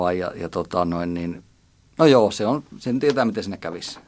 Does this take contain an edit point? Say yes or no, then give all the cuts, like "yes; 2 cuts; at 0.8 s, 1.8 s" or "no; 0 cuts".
no; 0 cuts